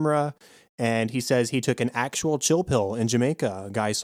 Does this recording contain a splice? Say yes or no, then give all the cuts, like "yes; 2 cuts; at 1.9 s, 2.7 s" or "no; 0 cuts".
no; 0 cuts